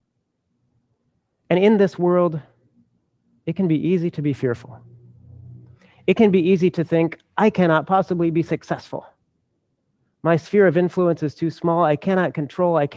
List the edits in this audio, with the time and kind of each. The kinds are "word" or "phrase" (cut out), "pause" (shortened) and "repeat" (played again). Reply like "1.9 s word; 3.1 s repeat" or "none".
none